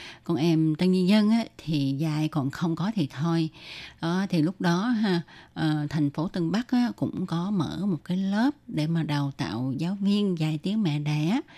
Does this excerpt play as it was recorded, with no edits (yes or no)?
yes